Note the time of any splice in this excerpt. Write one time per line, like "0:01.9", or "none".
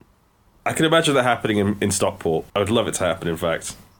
0:02.5